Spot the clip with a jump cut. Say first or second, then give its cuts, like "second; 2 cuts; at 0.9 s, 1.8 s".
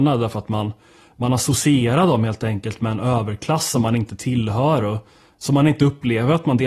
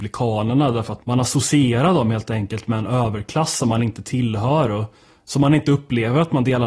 second; 1 cut; at 1.0 s